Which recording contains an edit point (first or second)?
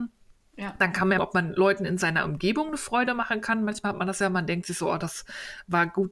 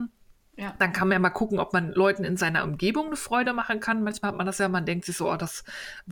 first